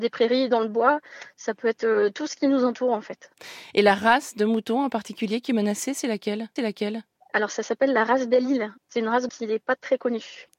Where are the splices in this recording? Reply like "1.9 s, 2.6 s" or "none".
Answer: 6.6 s, 8.8 s, 9.3 s